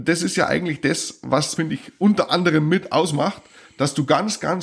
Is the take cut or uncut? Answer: cut